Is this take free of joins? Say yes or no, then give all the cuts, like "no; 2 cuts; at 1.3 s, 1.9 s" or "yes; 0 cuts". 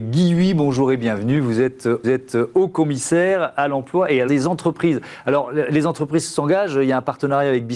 no; 2 cuts; at 2.0 s, 4.3 s